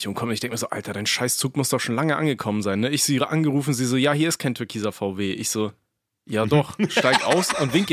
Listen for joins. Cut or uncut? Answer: uncut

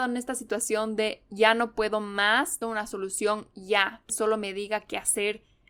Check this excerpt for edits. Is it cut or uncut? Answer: cut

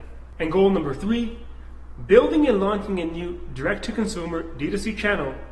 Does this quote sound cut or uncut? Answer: uncut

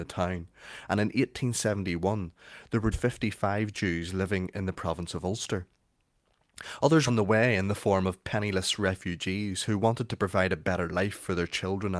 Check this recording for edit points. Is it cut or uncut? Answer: cut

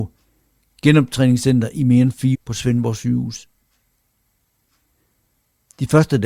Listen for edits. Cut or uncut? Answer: cut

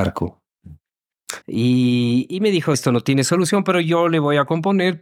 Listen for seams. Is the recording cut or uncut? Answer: cut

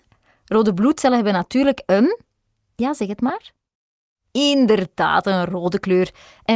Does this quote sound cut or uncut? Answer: uncut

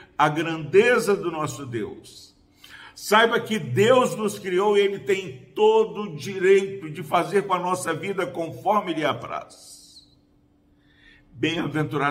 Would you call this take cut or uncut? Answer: uncut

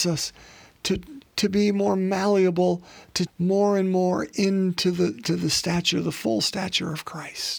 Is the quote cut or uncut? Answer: cut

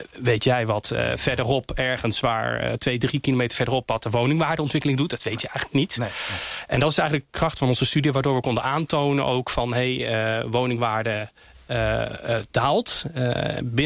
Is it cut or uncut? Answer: uncut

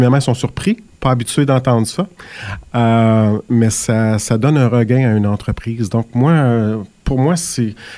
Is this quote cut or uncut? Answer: cut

